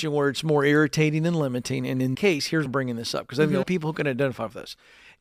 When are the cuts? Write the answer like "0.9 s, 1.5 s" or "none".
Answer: 2.1 s, 2.7 s, 3.6 s

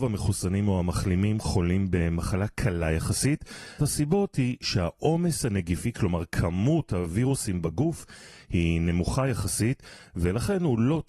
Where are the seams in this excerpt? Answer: 3.8 s

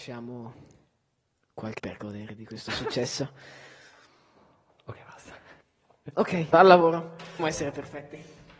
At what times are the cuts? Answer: 1.8 s, 5.6 s, 6.5 s, 7.4 s

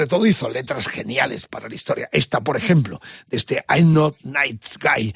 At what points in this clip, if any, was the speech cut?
none

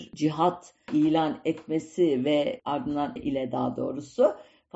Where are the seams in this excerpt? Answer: 3.2 s

